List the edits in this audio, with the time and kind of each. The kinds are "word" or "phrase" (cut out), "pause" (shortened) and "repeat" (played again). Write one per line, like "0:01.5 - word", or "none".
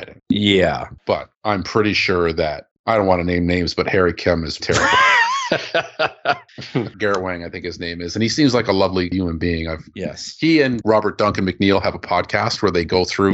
0:04.6 - word